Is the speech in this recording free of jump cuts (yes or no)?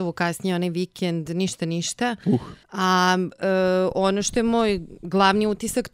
no